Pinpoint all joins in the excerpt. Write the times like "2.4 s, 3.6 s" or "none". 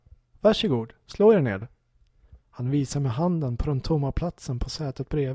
2.4 s